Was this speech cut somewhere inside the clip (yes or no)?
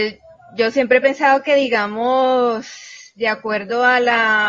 no